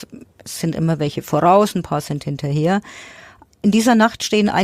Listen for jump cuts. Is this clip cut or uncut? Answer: uncut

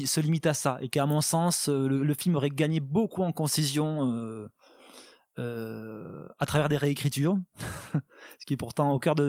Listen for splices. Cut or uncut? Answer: uncut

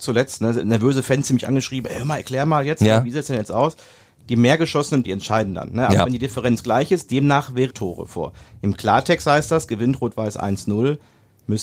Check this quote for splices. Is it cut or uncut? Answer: cut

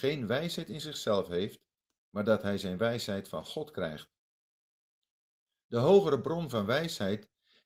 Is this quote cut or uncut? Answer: uncut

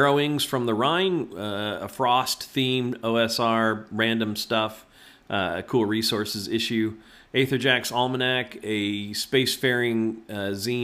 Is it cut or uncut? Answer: uncut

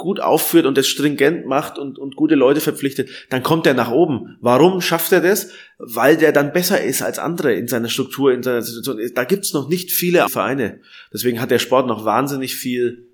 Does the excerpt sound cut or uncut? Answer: cut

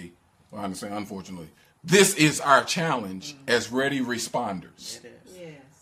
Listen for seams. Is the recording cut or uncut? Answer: uncut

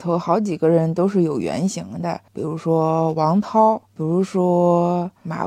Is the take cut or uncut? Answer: cut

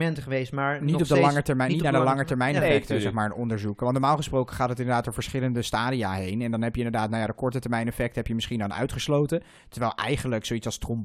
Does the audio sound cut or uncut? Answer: uncut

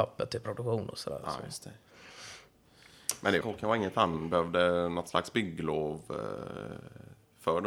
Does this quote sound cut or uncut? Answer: cut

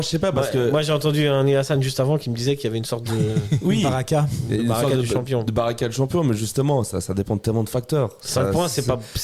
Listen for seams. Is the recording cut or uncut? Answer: uncut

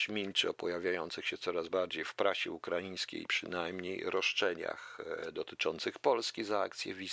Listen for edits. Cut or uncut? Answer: uncut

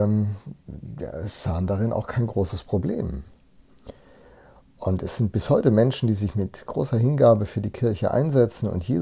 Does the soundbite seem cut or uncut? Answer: uncut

